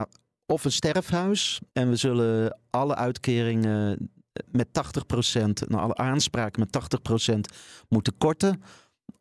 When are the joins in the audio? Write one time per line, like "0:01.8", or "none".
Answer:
0:01.7